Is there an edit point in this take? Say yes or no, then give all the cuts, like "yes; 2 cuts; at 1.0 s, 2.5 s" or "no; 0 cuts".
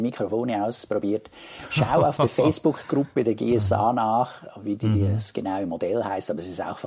no; 0 cuts